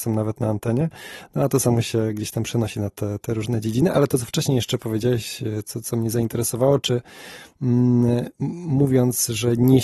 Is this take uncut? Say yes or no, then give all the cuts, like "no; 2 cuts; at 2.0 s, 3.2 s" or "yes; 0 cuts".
yes; 0 cuts